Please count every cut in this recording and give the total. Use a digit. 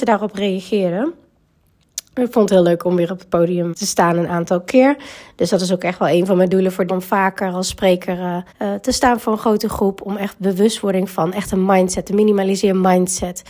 3